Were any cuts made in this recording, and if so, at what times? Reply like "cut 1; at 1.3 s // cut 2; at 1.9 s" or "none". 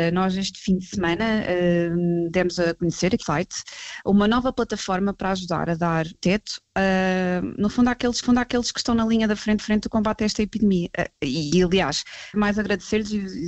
cut 1; at 3.2 s // cut 2; at 6.1 s // cut 3; at 8.2 s // cut 4; at 9.6 s // cut 5; at 12.3 s